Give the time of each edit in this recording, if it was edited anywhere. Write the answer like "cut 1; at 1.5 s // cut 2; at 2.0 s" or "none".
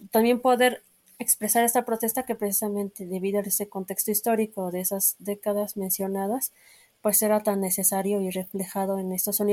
none